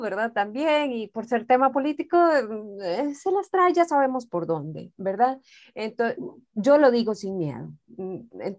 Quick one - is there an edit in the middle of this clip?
no; 0 cuts

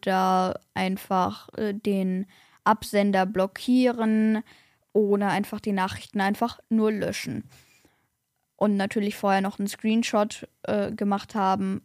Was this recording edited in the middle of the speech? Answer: no; 0 cuts

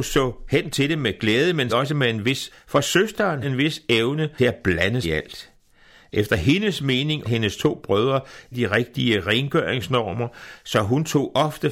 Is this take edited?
yes; 7 cuts; at 1.7 s, 2.5 s, 3.4 s, 4.4 s, 5.0 s, 7.2 s, 8.5 s

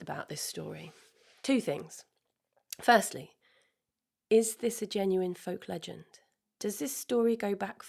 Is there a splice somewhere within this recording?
no; 0 cuts

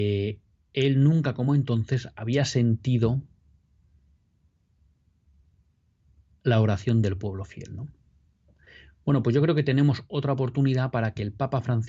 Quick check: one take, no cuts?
yes; 0 cuts

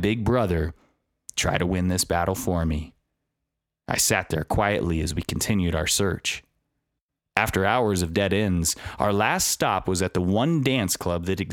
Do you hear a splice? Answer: no; 0 cuts

